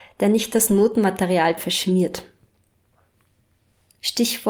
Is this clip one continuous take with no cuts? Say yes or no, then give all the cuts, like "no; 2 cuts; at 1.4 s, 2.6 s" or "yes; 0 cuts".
no; 1 cut; at 1.6 s